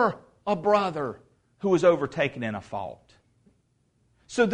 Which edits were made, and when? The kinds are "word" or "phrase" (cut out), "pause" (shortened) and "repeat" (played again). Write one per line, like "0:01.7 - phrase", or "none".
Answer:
none